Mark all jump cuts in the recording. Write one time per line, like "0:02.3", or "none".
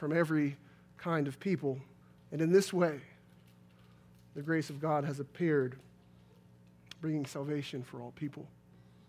0:02.0